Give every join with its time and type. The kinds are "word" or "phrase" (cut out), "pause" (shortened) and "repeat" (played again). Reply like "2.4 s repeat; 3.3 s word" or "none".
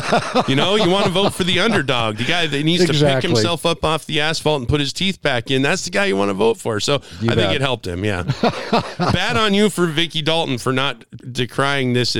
none